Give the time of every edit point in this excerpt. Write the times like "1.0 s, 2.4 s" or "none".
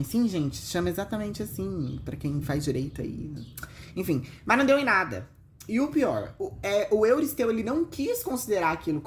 none

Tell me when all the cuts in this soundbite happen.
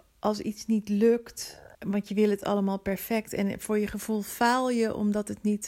1.7 s

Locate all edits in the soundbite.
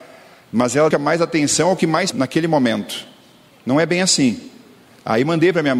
0.9 s, 2.1 s

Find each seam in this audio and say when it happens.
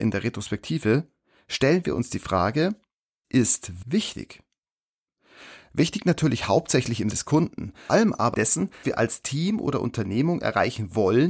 3.2 s, 3.8 s, 7.1 s, 7.9 s, 8.3 s, 8.8 s

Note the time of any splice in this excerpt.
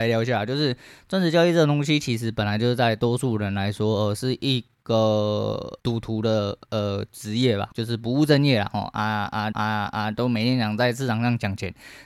5.8 s, 7.7 s, 9.5 s

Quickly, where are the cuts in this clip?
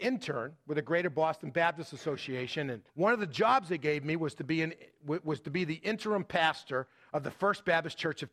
2.9 s

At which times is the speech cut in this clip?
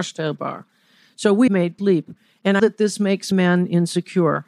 1.5 s, 1.8 s, 2.6 s, 3.3 s

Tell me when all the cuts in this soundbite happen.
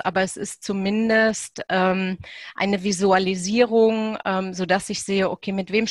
none

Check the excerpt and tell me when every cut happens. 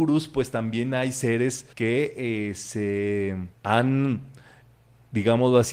1.7 s, 3.5 s

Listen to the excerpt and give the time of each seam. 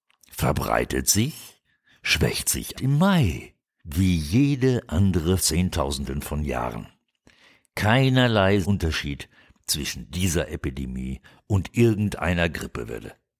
2.7 s, 3.7 s, 5.4 s, 8.6 s

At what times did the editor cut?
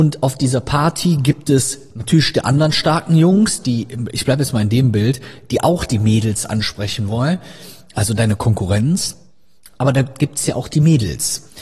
none

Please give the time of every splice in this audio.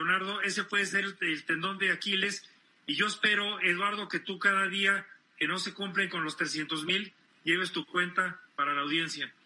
none

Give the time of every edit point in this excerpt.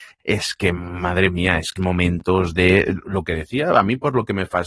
1.8 s

